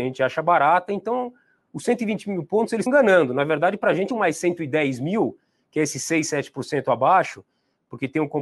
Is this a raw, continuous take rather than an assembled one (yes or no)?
no